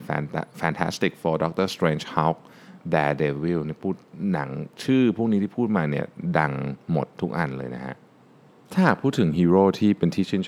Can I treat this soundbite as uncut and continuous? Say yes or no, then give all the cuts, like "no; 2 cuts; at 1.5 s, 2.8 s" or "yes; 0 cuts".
yes; 0 cuts